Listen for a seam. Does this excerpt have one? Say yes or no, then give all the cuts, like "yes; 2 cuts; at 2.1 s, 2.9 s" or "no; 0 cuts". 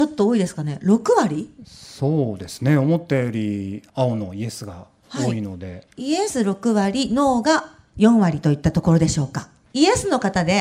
no; 0 cuts